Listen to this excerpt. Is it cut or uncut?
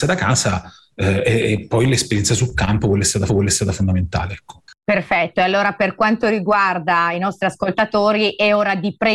cut